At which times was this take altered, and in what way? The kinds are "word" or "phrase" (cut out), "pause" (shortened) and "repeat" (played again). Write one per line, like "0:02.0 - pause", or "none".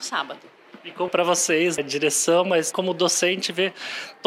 0:01.1 - word
0:01.8 - word
0:02.7 - word